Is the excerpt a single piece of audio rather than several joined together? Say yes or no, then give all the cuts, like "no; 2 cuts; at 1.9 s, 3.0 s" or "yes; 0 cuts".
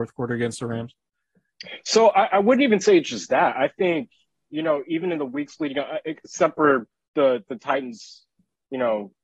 yes; 0 cuts